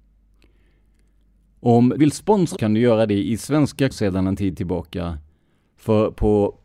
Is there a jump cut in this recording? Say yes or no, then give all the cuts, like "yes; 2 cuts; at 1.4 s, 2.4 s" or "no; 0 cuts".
yes; 3 cuts; at 2.0 s, 2.5 s, 3.9 s